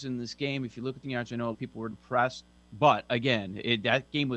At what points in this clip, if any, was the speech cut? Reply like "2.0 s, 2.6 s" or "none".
1.0 s, 1.5 s, 1.9 s